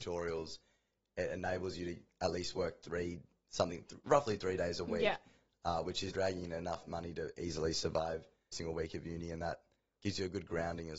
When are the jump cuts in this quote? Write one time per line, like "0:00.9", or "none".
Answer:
0:06.1
0:08.5